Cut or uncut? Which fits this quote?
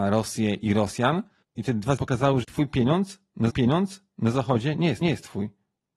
cut